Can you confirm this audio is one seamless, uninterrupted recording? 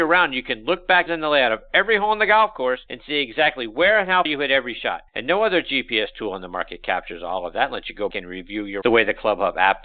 no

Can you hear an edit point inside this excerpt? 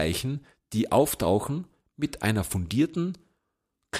no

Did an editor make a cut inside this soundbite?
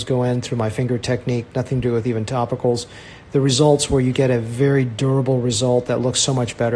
no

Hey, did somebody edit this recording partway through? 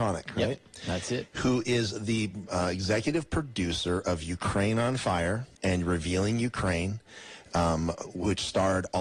yes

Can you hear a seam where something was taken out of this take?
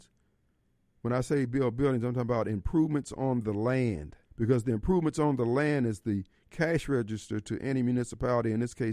yes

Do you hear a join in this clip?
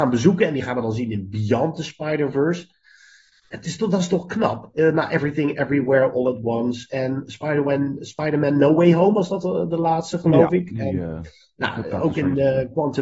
no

